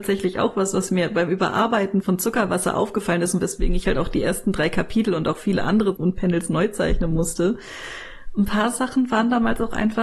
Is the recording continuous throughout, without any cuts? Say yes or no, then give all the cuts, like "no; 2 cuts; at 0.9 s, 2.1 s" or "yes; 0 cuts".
no; 2 cuts; at 2.0 s, 5.9 s